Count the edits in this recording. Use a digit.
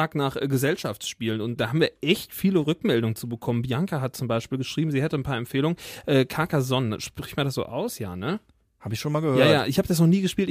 1